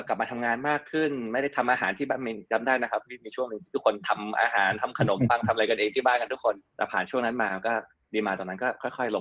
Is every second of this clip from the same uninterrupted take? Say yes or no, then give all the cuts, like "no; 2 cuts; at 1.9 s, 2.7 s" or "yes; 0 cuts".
no; 1 cut; at 6.7 s